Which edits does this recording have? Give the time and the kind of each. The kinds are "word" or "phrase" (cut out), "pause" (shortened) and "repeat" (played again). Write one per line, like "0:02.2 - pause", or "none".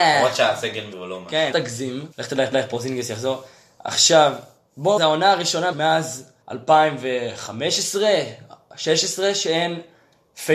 0:00.9 - word
0:01.5 - word
0:02.1 - pause
0:02.5 - repeat
0:05.0 - phrase
0:05.7 - word
0:06.4 - pause